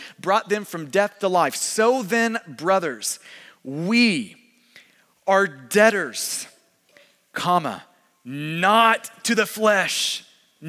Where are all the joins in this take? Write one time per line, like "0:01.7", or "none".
none